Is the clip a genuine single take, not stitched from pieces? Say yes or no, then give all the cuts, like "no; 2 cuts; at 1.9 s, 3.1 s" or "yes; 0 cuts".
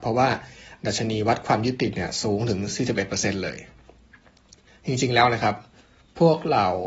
yes; 0 cuts